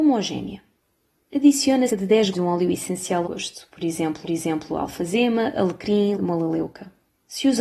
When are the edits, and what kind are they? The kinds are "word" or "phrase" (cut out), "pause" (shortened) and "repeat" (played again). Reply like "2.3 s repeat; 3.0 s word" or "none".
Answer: 1.9 s word; 2.3 s word; 3.2 s phrase; 4.2 s repeat; 6.1 s word